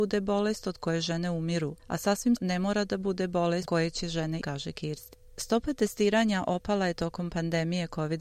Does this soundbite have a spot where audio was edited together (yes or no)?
yes